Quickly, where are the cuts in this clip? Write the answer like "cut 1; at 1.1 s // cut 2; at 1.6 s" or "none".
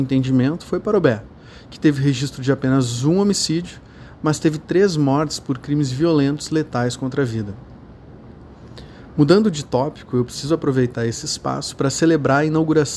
none